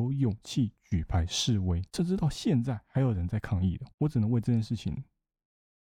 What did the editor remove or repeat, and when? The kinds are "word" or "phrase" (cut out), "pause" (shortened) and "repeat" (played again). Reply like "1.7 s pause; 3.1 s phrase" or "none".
1.9 s pause; 3.9 s pause